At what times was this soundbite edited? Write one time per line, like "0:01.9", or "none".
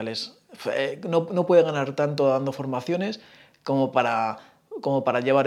none